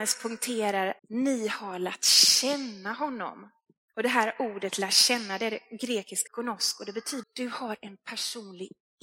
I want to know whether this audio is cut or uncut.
cut